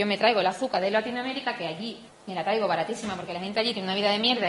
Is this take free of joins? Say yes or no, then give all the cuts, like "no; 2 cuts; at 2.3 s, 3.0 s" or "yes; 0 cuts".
no; 1 cut; at 2.1 s